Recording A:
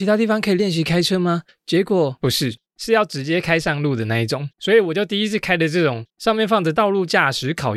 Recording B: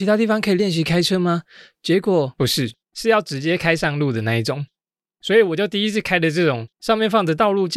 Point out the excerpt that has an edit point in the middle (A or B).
A